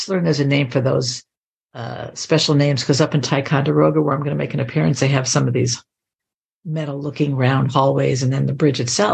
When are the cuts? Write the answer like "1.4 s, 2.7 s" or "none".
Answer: none